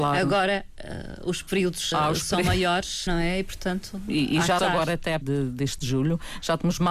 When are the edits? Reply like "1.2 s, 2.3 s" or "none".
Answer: 1.9 s, 3.1 s, 4.6 s, 5.2 s, 5.8 s